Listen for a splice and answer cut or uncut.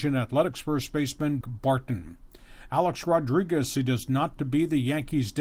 cut